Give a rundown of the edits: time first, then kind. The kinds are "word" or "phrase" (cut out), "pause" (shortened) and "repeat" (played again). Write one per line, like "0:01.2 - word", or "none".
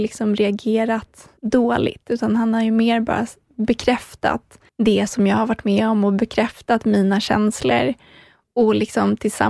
0:01.4 - pause
0:04.7 - pause